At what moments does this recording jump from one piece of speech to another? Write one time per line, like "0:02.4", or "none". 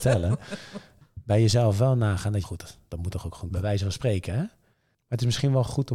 0:02.4
0:03.5